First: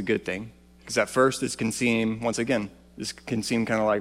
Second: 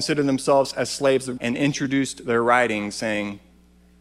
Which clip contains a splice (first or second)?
second